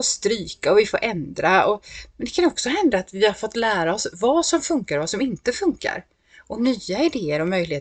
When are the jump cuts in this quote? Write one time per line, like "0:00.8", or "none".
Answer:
none